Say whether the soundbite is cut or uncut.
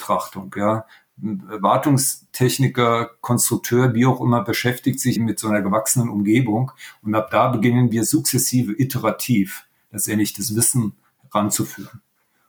cut